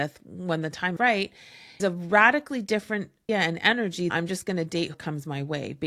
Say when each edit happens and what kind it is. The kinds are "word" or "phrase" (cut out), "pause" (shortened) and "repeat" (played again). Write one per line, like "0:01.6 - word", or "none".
0:01.0 - word
0:01.8 - word
0:03.3 - word
0:04.1 - word
0:04.9 - word